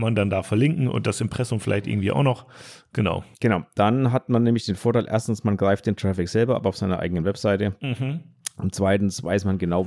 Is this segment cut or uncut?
cut